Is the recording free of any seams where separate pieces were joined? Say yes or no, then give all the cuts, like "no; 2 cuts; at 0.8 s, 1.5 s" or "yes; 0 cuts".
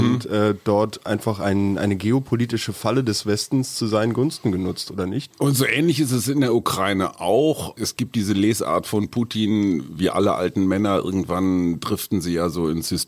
yes; 0 cuts